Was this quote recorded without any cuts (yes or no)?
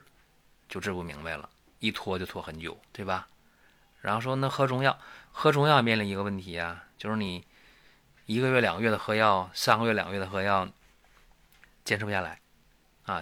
yes